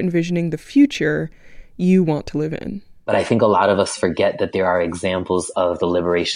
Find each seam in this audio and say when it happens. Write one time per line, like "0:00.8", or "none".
none